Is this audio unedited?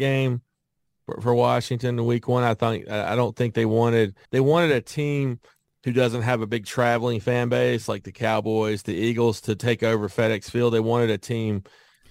no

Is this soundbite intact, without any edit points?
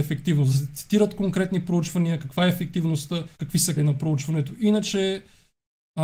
no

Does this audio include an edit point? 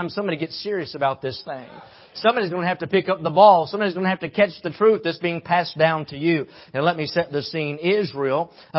no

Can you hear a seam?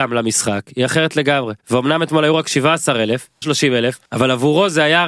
yes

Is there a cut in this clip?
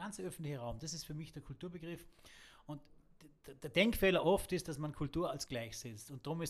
yes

